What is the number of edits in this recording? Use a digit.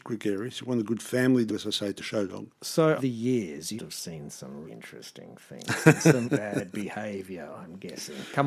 6